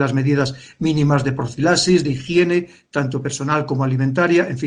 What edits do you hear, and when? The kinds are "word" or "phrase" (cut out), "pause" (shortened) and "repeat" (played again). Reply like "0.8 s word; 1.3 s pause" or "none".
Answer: none

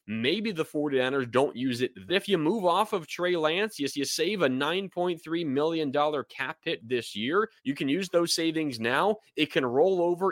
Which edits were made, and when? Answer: 2.1 s phrase; 3.9 s repeat; 7.6 s pause

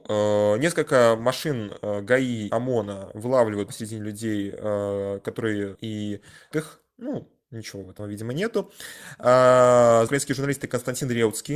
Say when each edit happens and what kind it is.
2.5 s word; 3.7 s word; 5.7 s word; 6.5 s word; 8.0 s word; 10.1 s word

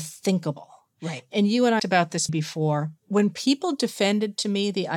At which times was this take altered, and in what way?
1.8 s phrase; 2.3 s word; 3.0 s pause

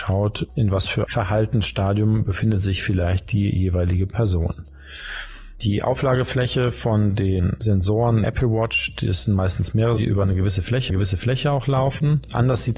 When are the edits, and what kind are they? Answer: 1.1 s word; 8.2 s word; 10.0 s word; 10.9 s repeat

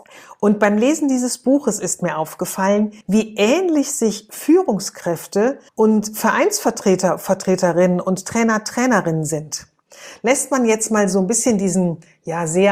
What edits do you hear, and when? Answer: 3.0 s pause; 5.7 s pause

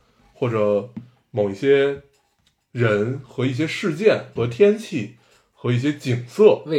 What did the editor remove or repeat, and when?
4.4 s word

